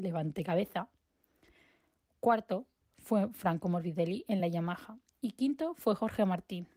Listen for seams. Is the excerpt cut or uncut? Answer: uncut